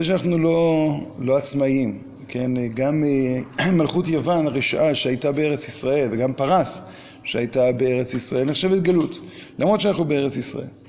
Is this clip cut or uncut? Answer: uncut